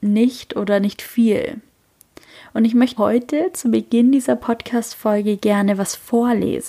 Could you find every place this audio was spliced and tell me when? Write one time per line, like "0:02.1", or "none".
0:03.0